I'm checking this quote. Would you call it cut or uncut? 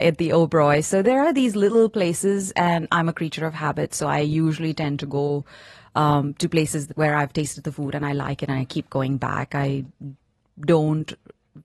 uncut